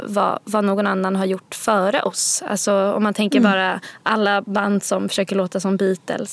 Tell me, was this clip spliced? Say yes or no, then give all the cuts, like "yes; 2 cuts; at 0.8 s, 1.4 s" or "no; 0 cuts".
no; 0 cuts